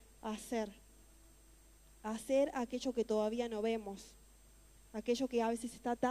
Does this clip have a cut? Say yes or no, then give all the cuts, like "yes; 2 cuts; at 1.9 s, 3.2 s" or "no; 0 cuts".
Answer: no; 0 cuts